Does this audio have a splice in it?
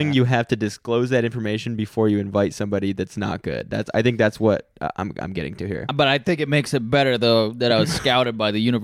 no; 0 cuts

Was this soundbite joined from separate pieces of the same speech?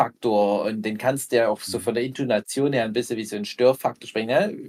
no; 0 cuts

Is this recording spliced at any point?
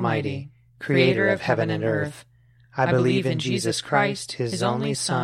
no; 0 cuts

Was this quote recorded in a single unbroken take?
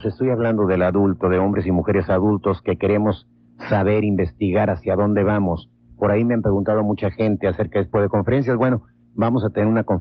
no; 1 cut; at 7.9 s

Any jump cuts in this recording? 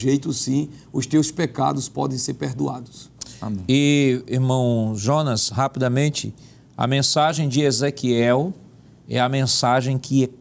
no; 0 cuts

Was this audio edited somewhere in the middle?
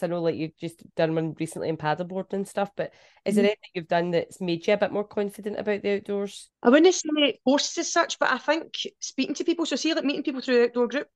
no; 0 cuts

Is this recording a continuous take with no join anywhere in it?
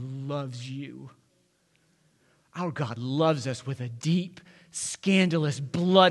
yes; 0 cuts

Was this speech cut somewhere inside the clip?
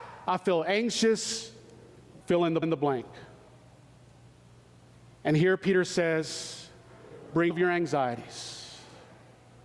yes; 3 cuts; at 2.2 s, 2.6 s, 7.5 s

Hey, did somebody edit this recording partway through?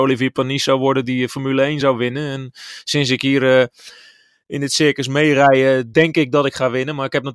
no; 0 cuts

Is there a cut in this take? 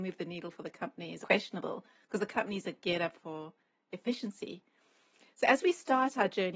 yes; 1 cut; at 1.2 s

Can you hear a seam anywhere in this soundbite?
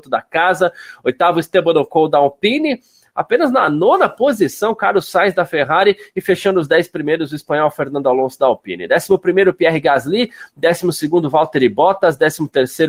no; 0 cuts

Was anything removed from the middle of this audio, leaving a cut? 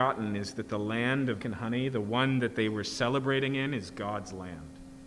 yes; 1 cut; at 1.4 s

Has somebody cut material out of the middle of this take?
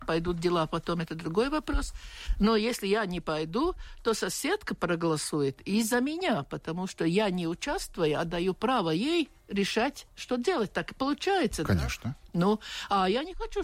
no; 0 cuts

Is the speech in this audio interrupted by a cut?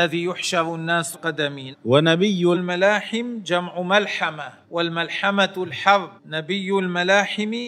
yes; 5 cuts; at 1.1 s, 1.7 s, 2.5 s, 4.6 s, 6.2 s

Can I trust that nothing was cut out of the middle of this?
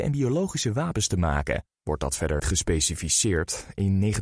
no; 2 cuts; at 1.8 s, 2.4 s

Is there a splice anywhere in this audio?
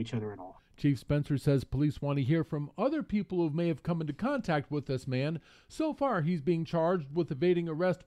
no; 0 cuts

